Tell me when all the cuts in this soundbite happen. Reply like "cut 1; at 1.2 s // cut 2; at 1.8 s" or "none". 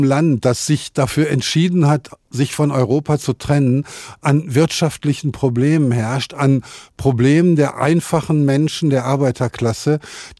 none